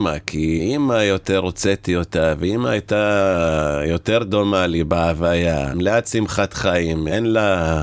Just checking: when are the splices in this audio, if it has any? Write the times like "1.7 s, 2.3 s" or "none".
none